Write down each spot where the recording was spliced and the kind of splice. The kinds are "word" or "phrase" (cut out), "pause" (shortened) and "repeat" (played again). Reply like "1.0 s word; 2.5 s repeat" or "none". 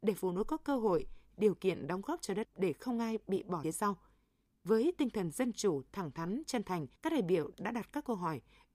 2.4 s word; 3.6 s phrase; 7.0 s pause